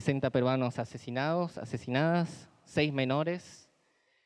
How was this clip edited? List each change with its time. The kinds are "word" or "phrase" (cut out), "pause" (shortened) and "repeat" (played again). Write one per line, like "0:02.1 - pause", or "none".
none

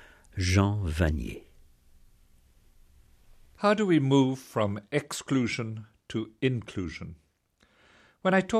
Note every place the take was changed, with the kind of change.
none

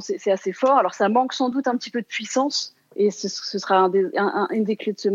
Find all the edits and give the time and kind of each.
none

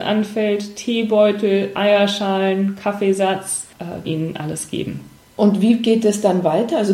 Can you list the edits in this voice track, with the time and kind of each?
0:04.0 - phrase

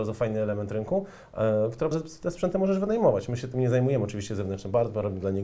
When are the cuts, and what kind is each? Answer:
0:01.9 - word

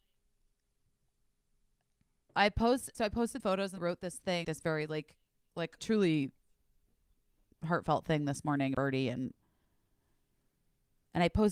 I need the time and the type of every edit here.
0:02.9 - word
0:03.4 - word
0:03.8 - word
0:04.4 - word
0:05.8 - word
0:08.7 - word

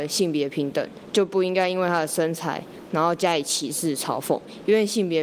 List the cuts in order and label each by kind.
0:02.9 - phrase

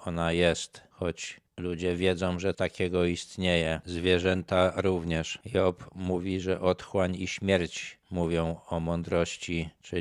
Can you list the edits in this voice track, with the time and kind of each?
0:02.5 - word

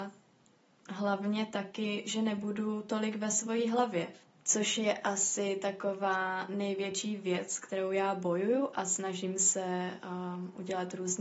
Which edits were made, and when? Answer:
none

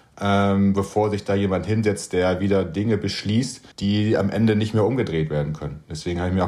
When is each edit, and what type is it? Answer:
0:03.7 - pause

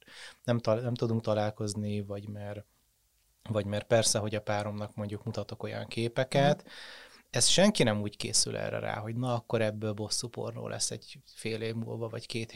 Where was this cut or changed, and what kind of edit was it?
none

